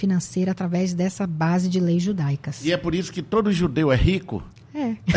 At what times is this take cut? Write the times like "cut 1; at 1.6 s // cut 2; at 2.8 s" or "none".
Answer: none